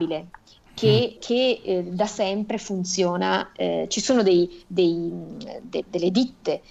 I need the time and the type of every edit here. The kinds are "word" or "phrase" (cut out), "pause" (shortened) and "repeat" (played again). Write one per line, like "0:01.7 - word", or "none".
0:01.2 - word